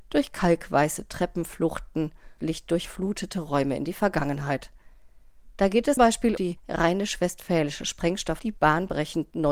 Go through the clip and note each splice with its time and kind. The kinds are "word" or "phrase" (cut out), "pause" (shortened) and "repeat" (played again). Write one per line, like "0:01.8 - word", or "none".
0:02.4 - word
0:06.0 - word
0:06.4 - word
0:08.4 - word